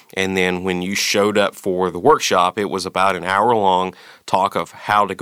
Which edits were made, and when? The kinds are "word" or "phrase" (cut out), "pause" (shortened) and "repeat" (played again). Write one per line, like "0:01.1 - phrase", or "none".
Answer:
none